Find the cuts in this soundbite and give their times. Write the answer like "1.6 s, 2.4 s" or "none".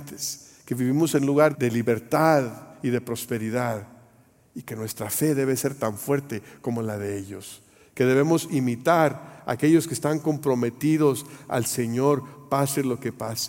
1.5 s